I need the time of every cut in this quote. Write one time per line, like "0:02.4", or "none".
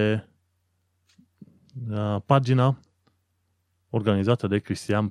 none